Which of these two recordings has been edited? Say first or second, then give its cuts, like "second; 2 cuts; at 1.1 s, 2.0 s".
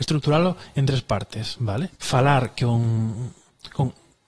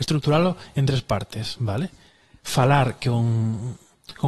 first; 1 cut; at 1.9 s